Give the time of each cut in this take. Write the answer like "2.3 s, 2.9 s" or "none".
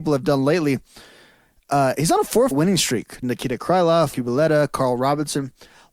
2.5 s, 3.2 s, 4.1 s

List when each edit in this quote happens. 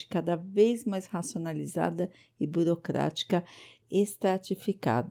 3.8 s

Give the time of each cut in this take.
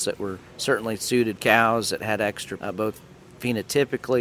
1.4 s, 2.6 s

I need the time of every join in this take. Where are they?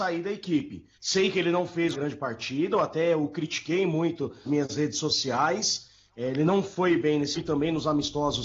0.9 s, 1.9 s, 4.4 s, 7.3 s

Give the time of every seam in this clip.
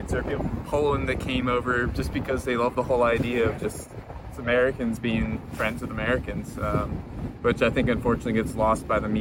none

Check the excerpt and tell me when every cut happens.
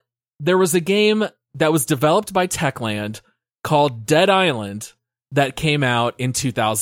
none

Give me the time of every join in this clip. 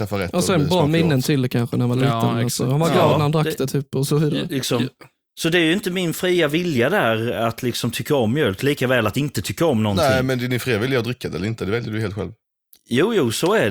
none

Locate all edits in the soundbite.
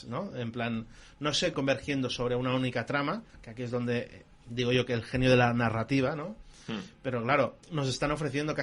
1.5 s, 3.3 s, 7.6 s

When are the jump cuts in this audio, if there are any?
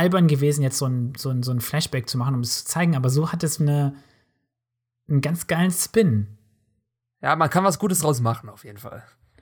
3.6 s

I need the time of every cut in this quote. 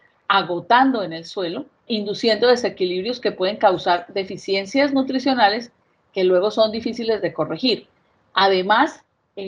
1.9 s

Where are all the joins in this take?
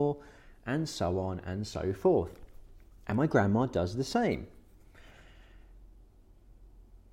none

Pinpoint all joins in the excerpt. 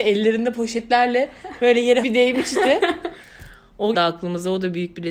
2.0 s, 3.9 s

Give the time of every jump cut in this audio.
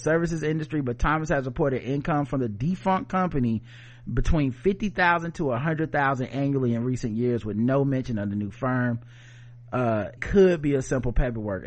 10.2 s

